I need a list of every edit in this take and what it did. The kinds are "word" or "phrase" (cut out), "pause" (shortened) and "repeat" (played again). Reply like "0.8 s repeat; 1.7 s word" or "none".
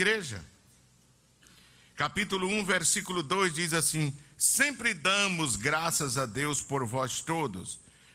none